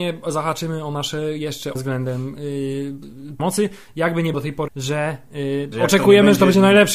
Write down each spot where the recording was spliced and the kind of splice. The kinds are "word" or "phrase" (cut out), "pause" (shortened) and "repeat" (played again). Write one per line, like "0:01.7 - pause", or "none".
0:01.8 - word
0:03.4 - word
0:04.3 - word
0:04.7 - word
0:05.7 - word